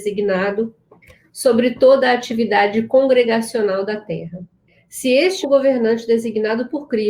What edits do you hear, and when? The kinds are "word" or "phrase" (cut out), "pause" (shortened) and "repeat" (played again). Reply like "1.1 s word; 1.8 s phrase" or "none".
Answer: 5.4 s word